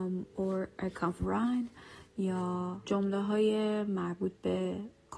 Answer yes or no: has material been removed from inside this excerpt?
yes